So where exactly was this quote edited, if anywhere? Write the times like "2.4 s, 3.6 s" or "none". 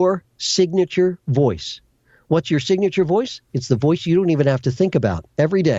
none